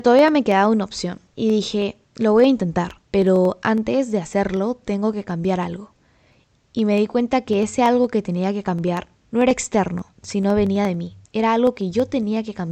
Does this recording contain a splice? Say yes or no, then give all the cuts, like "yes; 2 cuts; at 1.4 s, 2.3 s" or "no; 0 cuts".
yes; 6 cuts; at 1.3 s, 2.0 s, 3.0 s, 9.2 s, 10.1 s, 11.3 s